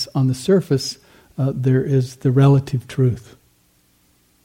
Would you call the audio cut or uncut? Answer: uncut